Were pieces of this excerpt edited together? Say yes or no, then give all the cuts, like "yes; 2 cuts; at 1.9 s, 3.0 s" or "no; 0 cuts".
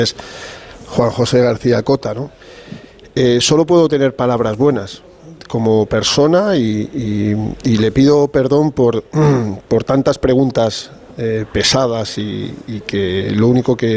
no; 0 cuts